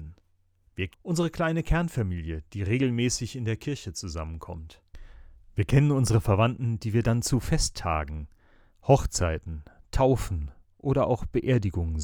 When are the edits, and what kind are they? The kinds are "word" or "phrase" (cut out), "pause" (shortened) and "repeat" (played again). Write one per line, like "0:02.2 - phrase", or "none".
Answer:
0:00.9 - word